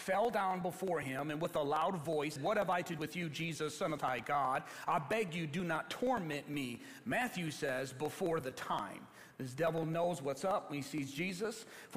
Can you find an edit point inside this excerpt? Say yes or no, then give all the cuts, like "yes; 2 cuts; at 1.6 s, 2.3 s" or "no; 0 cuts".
yes; 3 cuts; at 2.4 s, 3.0 s, 4.0 s